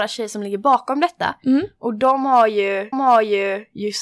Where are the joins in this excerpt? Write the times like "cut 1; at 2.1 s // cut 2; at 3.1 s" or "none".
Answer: cut 1; at 2.9 s